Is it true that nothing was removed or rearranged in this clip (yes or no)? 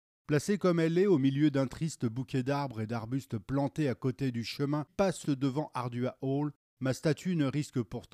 no